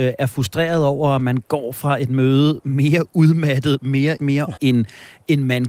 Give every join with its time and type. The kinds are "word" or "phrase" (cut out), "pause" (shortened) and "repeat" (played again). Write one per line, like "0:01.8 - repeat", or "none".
0:04.2 - word
0:04.6 - word